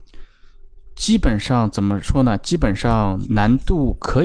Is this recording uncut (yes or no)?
no